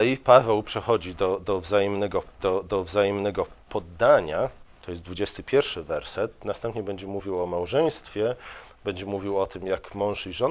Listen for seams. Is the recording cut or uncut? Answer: cut